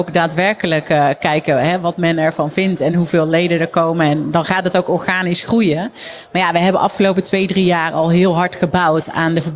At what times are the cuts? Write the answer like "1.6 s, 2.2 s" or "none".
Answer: none